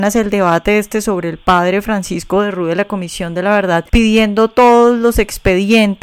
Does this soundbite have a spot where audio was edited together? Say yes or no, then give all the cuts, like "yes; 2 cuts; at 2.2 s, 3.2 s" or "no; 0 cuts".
yes; 1 cut; at 3.9 s